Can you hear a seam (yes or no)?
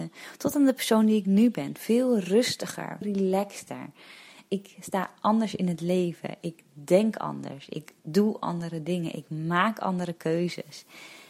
yes